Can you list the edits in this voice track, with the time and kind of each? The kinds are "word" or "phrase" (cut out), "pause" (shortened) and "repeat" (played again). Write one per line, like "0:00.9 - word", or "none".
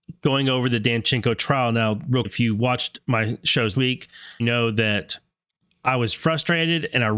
0:02.2 - word
0:03.7 - word
0:04.4 - word
0:05.6 - pause
0:06.2 - word